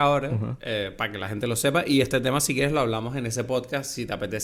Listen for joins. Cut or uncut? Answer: uncut